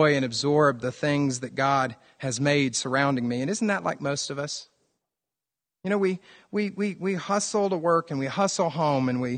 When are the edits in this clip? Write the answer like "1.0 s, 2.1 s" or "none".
none